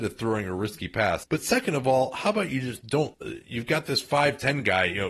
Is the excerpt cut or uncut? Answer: uncut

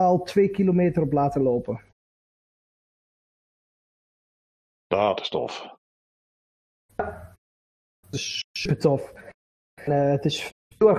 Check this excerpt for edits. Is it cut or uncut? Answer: uncut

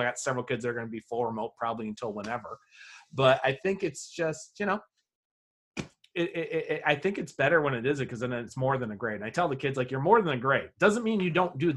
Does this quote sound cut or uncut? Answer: uncut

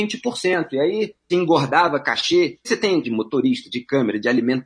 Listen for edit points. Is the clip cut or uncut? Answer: cut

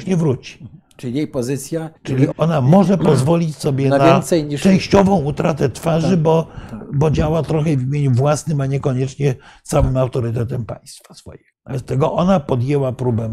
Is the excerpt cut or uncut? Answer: cut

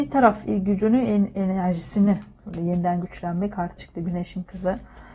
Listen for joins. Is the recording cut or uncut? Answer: cut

